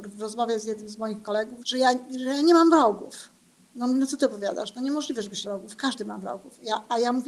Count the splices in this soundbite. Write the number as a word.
two